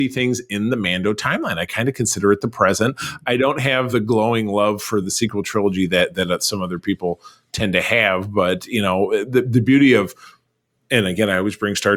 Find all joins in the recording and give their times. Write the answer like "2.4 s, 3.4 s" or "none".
3.9 s, 5.0 s